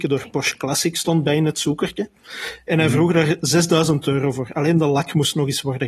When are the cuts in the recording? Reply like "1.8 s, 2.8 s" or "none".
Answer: none